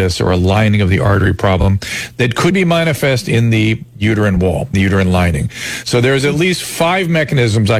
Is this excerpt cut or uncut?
cut